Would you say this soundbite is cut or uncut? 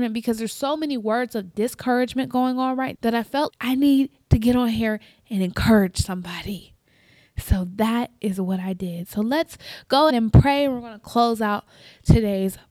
cut